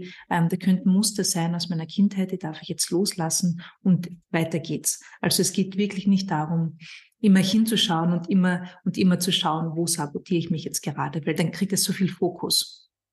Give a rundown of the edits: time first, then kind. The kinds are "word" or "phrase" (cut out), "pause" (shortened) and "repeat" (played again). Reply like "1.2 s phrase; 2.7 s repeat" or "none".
4.2 s pause; 11.4 s word

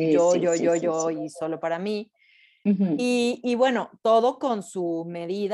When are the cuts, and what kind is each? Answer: none

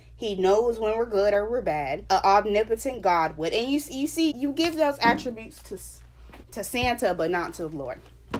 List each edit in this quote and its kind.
2.1 s word; 4.3 s word; 6.4 s pause

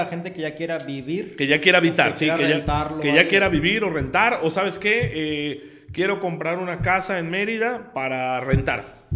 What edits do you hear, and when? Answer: none

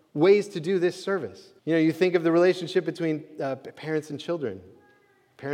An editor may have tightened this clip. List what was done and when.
1.6 s pause

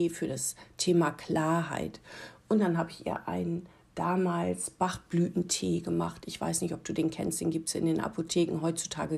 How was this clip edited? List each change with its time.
none

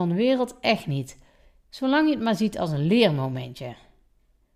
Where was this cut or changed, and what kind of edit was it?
none

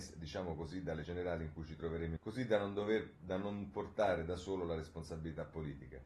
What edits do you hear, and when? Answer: 1.0 s word; 2.2 s word

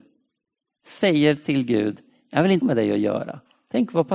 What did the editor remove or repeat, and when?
2.6 s word

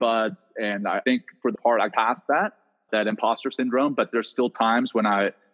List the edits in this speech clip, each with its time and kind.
1.0 s word; 1.5 s word; 1.9 s word; 2.9 s word

